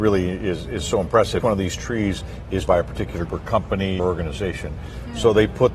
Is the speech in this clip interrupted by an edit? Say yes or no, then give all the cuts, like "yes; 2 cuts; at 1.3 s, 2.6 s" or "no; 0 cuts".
yes; 4 cuts; at 1.4 s, 2.7 s, 3.3 s, 4.0 s